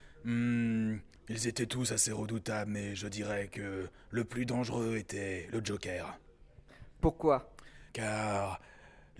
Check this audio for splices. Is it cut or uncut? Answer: cut